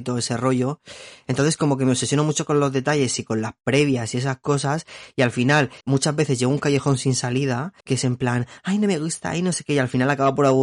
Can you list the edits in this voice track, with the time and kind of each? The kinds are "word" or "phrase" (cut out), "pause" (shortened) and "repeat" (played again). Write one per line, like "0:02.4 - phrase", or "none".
0:05.8 - pause
0:07.8 - pause